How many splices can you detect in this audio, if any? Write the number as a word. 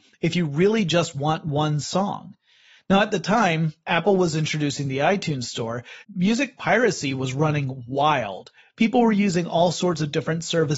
one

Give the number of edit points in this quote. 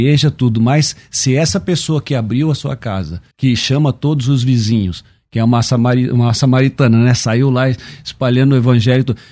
one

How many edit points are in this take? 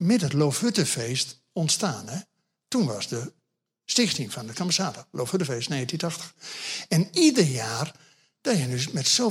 one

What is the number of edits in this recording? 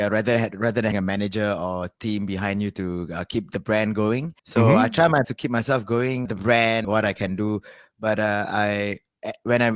five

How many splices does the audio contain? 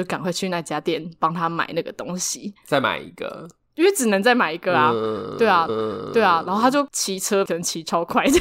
one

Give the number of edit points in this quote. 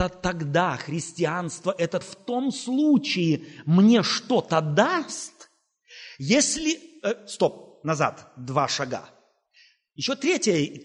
one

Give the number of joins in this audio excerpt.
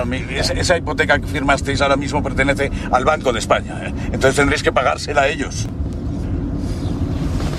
zero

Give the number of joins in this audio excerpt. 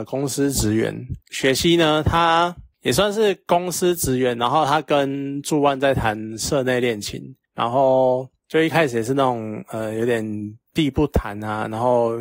one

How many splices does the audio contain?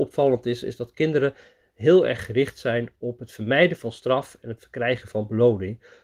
zero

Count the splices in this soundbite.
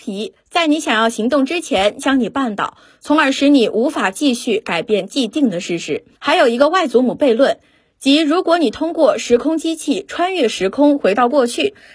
one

